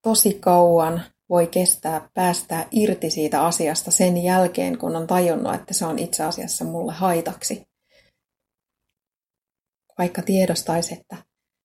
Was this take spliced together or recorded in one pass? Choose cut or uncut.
uncut